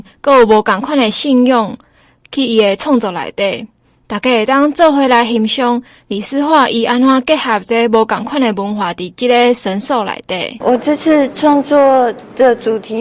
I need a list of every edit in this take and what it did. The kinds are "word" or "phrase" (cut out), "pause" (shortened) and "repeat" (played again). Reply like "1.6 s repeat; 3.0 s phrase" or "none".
none